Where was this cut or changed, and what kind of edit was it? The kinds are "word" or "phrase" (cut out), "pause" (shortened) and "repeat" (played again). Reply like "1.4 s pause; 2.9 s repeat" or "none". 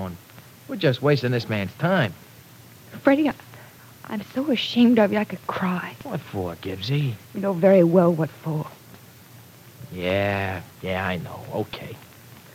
3.8 s pause; 7.2 s pause; 10.7 s pause